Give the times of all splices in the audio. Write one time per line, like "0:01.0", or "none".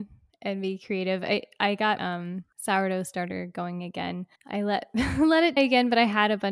0:02.0
0:02.5
0:04.4
0:05.6